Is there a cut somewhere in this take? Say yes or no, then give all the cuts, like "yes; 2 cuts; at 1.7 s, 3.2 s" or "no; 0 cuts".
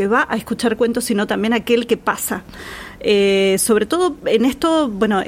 no; 0 cuts